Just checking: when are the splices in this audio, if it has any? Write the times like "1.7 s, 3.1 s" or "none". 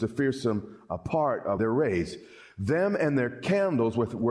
1.6 s